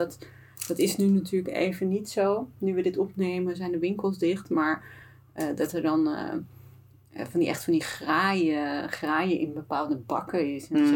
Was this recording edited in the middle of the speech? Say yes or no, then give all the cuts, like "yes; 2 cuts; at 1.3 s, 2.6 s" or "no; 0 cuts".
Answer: no; 0 cuts